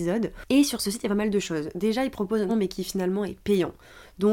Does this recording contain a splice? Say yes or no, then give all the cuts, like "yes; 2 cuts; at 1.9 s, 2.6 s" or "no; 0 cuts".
yes; 1 cut; at 2.5 s